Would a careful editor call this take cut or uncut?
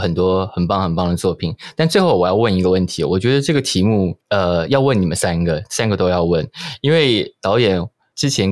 cut